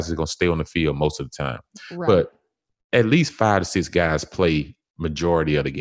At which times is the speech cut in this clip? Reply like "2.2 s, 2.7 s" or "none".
none